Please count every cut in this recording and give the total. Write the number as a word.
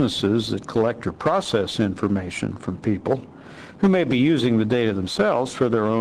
zero